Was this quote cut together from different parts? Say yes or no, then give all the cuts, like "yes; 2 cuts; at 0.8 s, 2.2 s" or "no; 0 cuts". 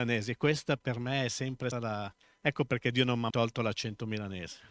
yes; 3 cuts; at 1.7 s, 2.2 s, 3.3 s